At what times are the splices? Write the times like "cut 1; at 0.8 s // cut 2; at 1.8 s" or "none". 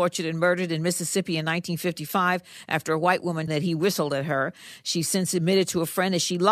cut 1; at 3.5 s